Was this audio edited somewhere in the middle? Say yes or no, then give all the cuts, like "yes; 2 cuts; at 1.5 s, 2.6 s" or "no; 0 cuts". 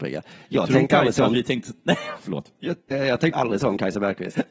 yes; 2 cuts; at 2.9 s, 3.3 s